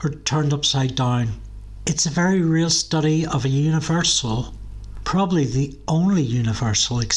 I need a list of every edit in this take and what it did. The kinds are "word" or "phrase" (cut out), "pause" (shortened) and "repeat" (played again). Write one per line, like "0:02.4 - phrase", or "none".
none